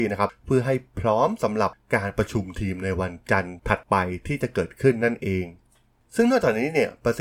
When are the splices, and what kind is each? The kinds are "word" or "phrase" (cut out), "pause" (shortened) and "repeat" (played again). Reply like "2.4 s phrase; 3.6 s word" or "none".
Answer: none